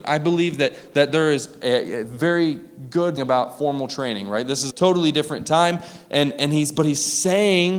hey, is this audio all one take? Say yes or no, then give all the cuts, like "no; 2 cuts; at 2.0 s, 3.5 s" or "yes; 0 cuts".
no; 2 cuts; at 3.2 s, 4.7 s